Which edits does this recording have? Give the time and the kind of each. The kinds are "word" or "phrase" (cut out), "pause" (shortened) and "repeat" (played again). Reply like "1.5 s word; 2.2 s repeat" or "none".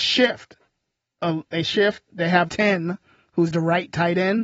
2.5 s word